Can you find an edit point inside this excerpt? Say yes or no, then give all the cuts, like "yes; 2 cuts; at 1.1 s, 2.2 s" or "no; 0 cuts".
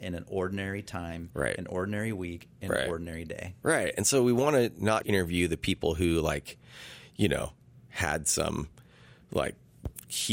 yes; 1 cut; at 5.0 s